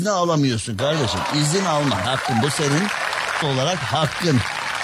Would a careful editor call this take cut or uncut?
cut